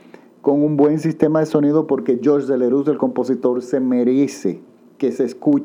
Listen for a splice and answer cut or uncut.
uncut